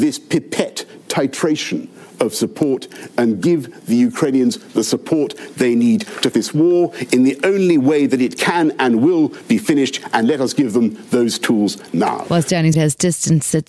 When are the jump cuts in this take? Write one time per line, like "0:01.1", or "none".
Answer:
0:06.3
0:12.7

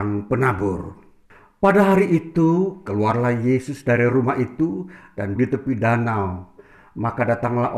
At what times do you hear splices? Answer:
0:01.3
0:05.4

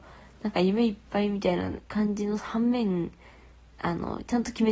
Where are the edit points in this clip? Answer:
0:01.8

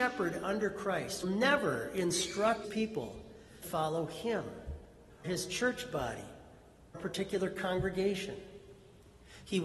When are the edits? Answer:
0:01.2
0:02.6
0:03.6
0:05.2
0:06.9

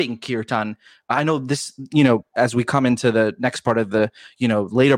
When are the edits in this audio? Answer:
none

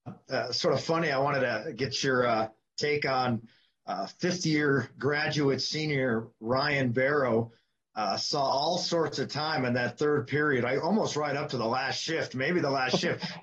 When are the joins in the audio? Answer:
none

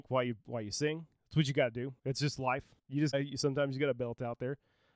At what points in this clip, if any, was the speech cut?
0:02.0
0:02.8
0:03.1

